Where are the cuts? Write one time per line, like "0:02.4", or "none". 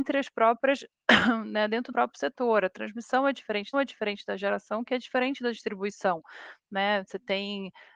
0:01.9
0:03.7